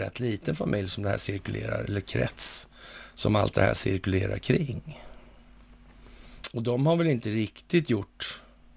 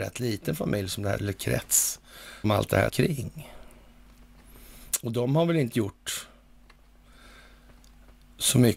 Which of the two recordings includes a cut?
second; 4 cuts; at 1.2 s, 2.4 s, 2.9 s, 5.7 s

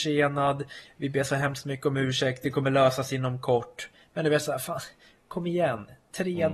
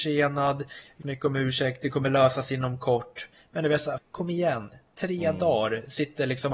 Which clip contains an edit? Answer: second; 2 cuts; at 1.0 s, 4.0 s

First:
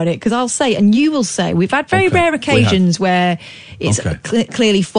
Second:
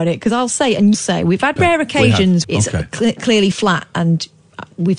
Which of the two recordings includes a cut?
second; 4 cuts; at 0.9 s, 1.6 s, 2.4 s, 3.5 s

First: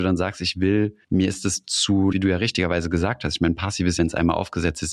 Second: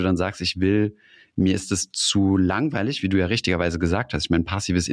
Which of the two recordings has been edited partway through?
first; 3 cuts; at 1.0 s, 2.1 s, 4.0 s

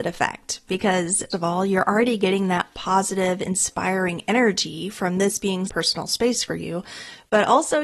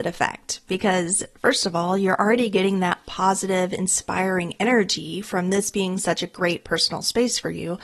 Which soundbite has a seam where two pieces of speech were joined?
first; 2 cuts; at 1.3 s, 5.7 s

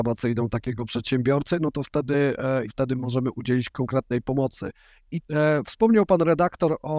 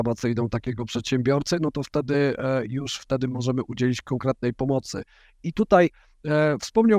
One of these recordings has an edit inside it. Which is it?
first; 2 cuts; at 2.7 s, 5.2 s

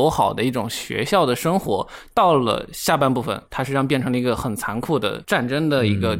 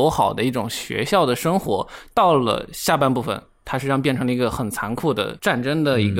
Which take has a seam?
first; 1 cut; at 3.4 s

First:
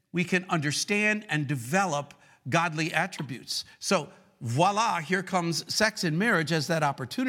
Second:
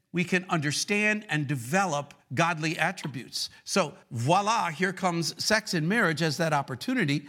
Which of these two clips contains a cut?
second; 2 cuts; at 2.2 s, 4.0 s

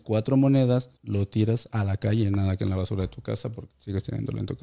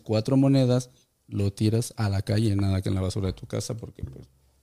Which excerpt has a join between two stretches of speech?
first; 2 cuts; at 1.0 s, 3.7 s

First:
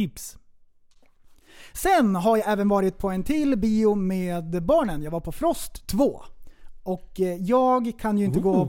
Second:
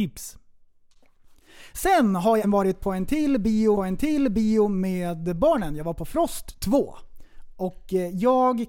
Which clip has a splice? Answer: second; 2 cuts; at 2.4 s, 3.8 s

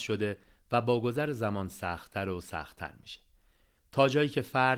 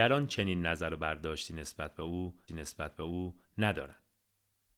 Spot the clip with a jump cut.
second; 1 cut; at 2.5 s

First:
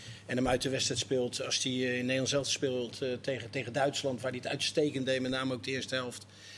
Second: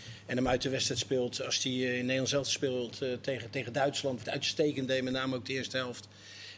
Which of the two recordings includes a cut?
second; 1 cut; at 4.2 s

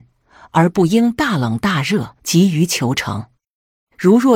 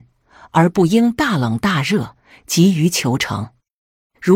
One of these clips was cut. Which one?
first; 1 cut; at 2.2 s

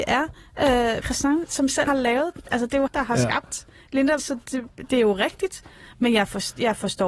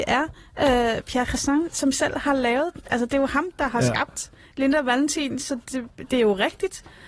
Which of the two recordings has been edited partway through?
first; 4 cuts; at 1.0 s, 1.9 s, 2.9 s, 4.2 s

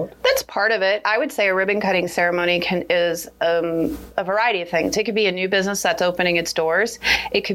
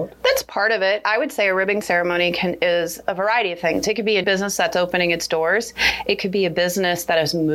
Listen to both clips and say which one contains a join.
second; 3 cuts; at 1.8 s, 3.0 s, 4.2 s

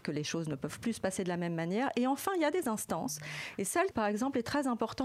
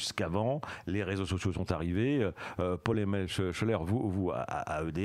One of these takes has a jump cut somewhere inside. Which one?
first; 1 cut; at 3.9 s

